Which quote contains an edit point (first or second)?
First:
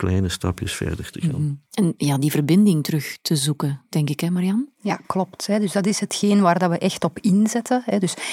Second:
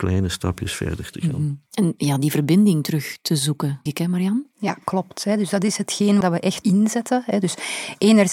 second